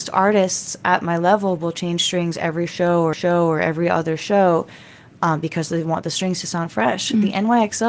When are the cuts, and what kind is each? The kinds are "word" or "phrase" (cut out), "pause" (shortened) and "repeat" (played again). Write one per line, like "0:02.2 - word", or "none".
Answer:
0:03.1 - repeat